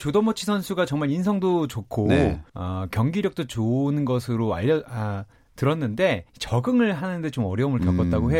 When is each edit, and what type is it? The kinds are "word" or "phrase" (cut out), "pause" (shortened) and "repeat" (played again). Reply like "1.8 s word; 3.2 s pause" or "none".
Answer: 2.5 s pause; 6.3 s pause